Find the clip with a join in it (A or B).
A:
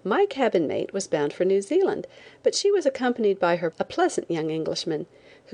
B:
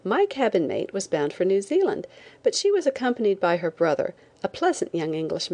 A